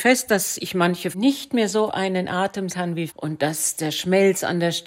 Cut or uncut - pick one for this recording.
cut